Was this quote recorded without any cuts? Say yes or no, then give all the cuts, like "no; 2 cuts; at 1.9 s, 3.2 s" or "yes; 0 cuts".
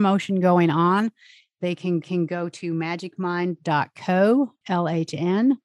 no; 2 cuts; at 2.0 s, 4.6 s